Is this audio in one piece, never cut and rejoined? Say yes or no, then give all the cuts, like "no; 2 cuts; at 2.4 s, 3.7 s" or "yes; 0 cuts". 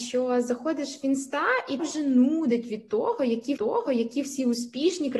no; 2 cuts; at 1.8 s, 3.6 s